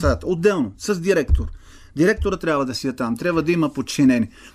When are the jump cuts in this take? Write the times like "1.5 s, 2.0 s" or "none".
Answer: none